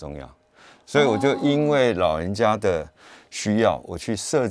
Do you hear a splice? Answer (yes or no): no